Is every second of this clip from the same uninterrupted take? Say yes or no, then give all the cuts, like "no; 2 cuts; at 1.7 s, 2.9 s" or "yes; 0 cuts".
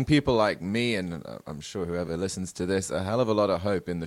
yes; 0 cuts